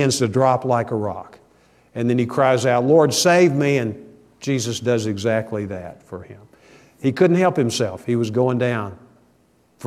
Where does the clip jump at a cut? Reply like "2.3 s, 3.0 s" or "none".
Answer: none